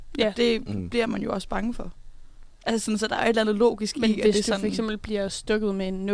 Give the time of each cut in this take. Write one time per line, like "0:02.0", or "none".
0:02.5